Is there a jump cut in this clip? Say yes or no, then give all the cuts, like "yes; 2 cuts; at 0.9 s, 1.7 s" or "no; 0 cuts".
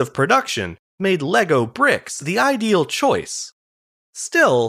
no; 0 cuts